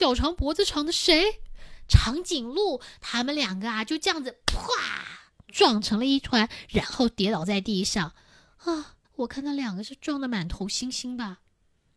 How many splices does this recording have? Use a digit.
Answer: 2